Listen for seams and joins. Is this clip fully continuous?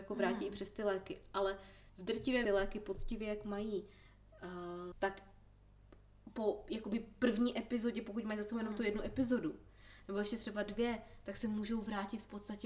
no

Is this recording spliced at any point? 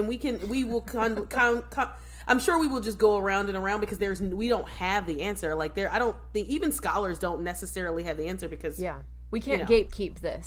no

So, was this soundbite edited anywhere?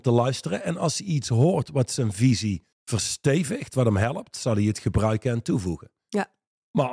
yes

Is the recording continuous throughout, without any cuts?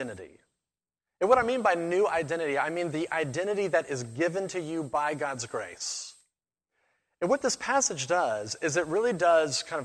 yes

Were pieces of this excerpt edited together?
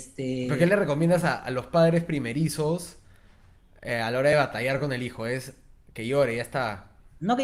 no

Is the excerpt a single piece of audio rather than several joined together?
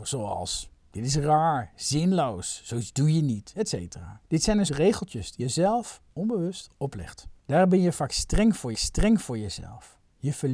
no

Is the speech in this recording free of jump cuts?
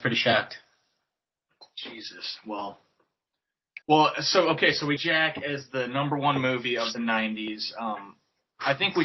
no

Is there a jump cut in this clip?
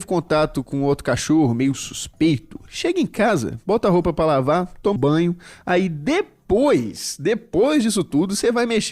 yes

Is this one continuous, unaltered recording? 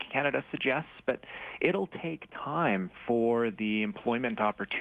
yes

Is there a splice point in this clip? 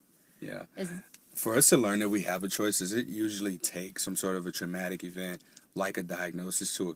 no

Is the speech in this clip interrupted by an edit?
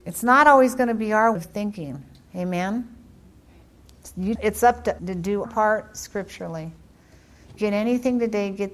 yes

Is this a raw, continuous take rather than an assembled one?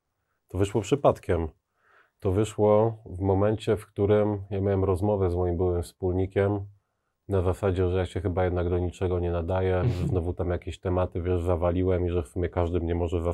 yes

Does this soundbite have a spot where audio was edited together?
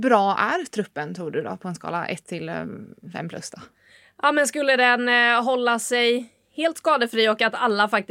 no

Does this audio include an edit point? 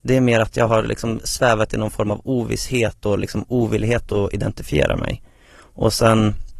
no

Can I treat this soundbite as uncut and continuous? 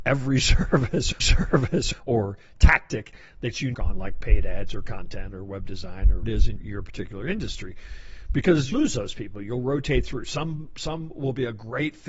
no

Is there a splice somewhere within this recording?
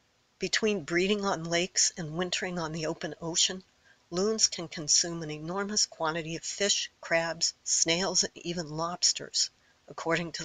no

